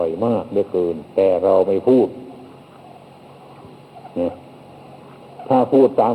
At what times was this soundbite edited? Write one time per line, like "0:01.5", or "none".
0:04.1